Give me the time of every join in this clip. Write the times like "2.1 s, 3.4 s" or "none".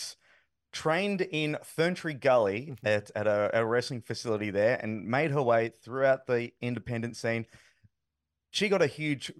none